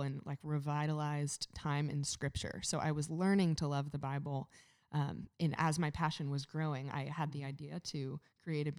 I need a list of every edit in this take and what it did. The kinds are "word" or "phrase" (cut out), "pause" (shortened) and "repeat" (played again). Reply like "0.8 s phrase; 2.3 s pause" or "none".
none